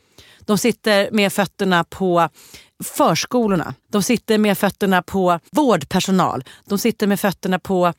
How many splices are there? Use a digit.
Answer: 2